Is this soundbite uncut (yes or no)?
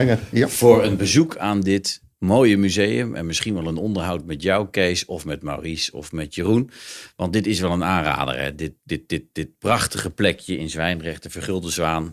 no